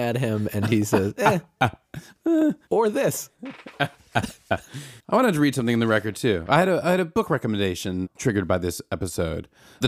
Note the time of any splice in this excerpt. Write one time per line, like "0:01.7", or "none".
0:05.0